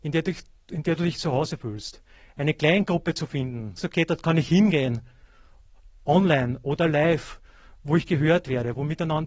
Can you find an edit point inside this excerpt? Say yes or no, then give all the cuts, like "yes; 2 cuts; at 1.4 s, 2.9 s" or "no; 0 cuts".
yes; 1 cut; at 3.8 s